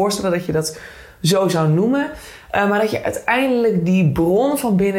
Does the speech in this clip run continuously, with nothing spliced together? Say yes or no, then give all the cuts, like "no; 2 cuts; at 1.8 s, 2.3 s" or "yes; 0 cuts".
yes; 0 cuts